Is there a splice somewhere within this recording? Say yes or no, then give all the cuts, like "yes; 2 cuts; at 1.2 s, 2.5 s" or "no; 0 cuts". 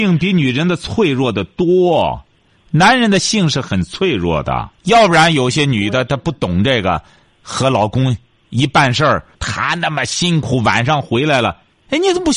yes; 2 cuts; at 4.8 s, 9.3 s